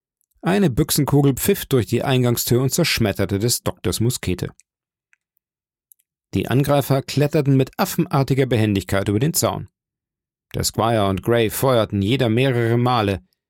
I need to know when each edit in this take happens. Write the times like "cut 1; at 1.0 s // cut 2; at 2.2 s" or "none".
none